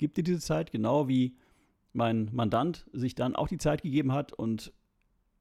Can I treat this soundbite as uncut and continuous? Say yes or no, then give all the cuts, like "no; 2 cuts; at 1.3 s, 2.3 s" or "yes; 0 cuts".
yes; 0 cuts